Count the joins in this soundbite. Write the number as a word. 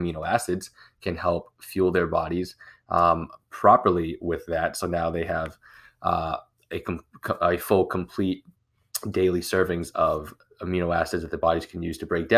zero